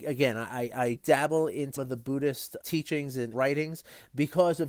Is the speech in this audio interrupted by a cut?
yes; 4 cuts; at 1.0 s, 1.8 s, 2.6 s, 3.3 s

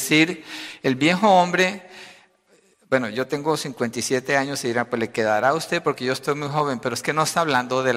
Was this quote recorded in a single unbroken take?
yes; 0 cuts

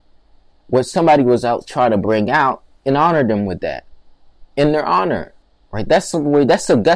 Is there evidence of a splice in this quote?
yes; 1 cut; at 5.4 s

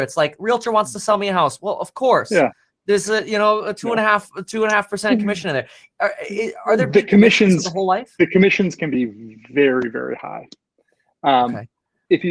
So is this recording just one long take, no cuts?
yes; 0 cuts

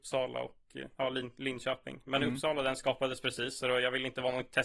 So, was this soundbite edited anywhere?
yes; 1 cut; at 0.9 s

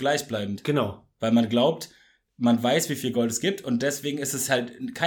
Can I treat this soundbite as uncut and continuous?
yes; 0 cuts

